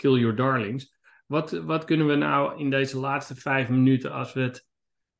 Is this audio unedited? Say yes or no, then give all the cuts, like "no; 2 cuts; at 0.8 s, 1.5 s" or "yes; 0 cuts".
yes; 0 cuts